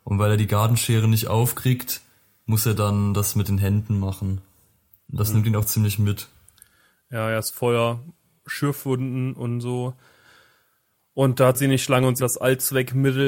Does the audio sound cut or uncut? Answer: cut